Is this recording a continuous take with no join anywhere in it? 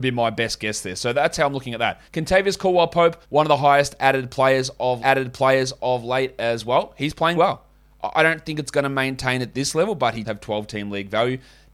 no; 5 cuts; at 2.1 s, 3.2 s, 5.0 s, 7.4 s, 10.2 s

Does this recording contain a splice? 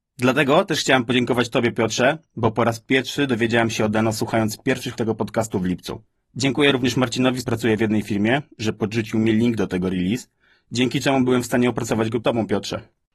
yes; 3 cuts; at 5.0 s, 7.5 s, 12.2 s

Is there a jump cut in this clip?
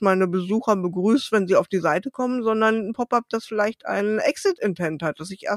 no; 0 cuts

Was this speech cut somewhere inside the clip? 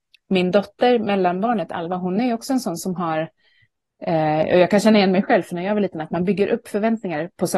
no; 0 cuts

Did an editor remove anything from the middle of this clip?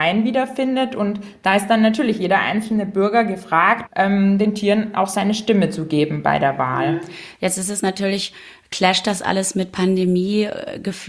yes; 1 cut; at 3.9 s

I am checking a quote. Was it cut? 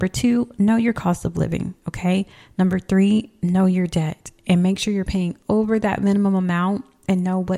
no; 0 cuts

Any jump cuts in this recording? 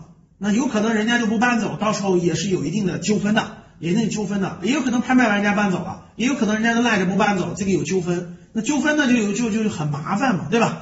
no; 0 cuts

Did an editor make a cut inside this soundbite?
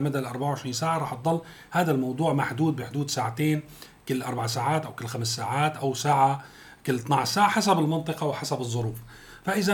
no; 0 cuts

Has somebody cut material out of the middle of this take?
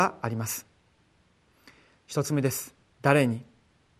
yes; 1 cut; at 2.9 s

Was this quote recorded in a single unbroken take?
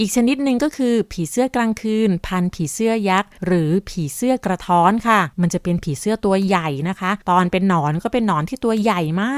no; 3 cuts; at 3.4 s, 5.3 s, 7.2 s

